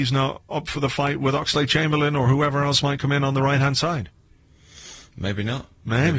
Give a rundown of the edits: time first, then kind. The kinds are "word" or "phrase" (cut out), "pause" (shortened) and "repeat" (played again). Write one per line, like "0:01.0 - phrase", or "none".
none